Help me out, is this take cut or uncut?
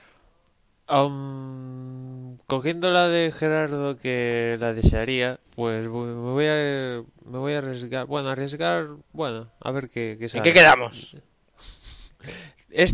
cut